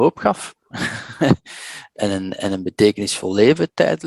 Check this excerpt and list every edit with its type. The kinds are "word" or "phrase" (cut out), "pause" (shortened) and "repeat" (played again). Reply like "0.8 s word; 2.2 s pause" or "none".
none

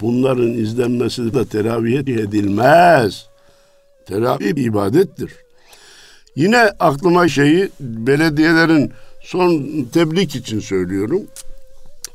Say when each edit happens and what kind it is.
1.3 s word; 2.1 s word; 4.6 s word; 7.3 s word; 9.9 s word

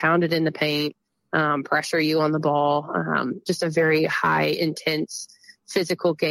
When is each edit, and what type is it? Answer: none

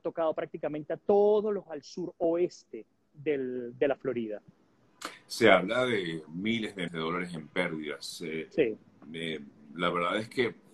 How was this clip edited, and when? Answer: 1.7 s word; 6.9 s word

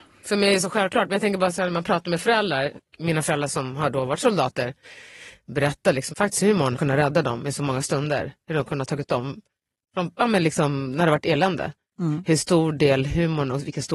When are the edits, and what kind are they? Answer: 2.8 s word; 6.1 s word; 6.7 s word; 9.1 s word

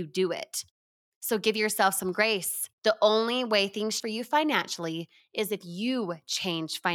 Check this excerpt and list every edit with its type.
2.7 s pause; 4.0 s word

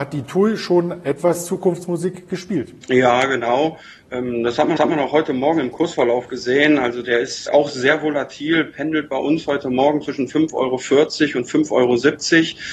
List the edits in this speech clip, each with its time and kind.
2.8 s pause; 4.8 s repeat; 7.5 s word

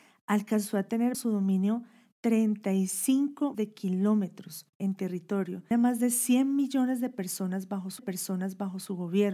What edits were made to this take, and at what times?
1.1 s word; 3.5 s word; 4.7 s pause; 5.7 s phrase; 8.0 s repeat

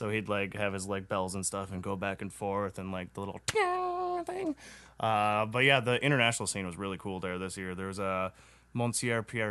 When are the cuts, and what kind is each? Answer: none

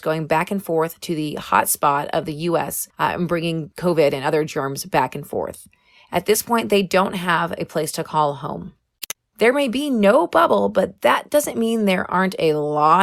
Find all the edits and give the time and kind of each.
none

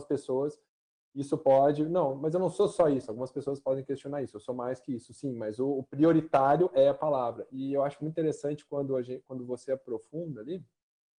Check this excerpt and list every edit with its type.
none

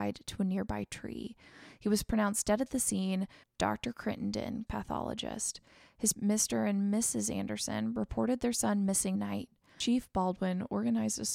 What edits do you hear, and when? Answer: 3.4 s word; 4.7 s word; 6.1 s word; 9.1 s word

